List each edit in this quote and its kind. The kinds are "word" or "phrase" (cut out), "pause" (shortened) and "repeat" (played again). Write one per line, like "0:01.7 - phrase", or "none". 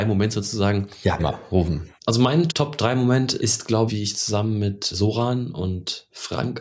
0:01.2 - word
0:02.0 - pause
0:02.5 - word
0:03.4 - word
0:03.9 - word
0:04.9 - word

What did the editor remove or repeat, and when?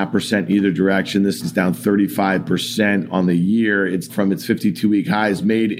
0:01.4 - word
0:04.1 - word

